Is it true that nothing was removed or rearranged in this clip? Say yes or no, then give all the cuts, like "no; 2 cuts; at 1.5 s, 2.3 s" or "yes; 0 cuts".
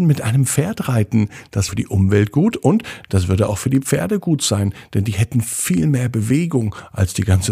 no; 1 cut; at 1.7 s